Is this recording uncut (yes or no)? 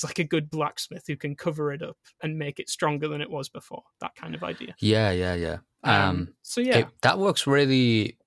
no